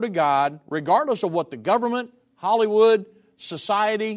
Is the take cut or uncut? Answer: uncut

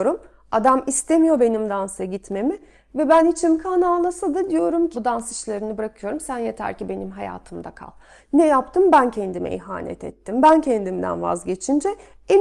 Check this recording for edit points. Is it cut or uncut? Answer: cut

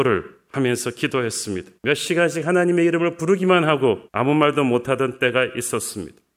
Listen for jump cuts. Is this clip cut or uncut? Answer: cut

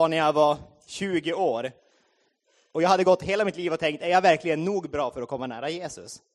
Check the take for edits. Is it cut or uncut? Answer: uncut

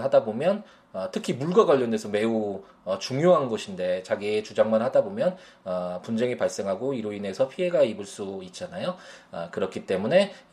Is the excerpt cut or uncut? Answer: uncut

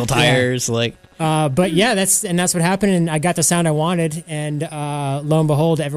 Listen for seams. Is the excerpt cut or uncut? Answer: cut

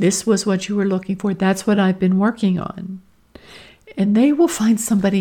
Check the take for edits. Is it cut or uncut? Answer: uncut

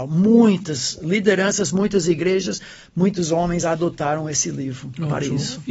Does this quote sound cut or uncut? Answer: uncut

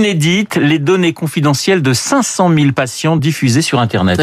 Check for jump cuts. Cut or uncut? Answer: uncut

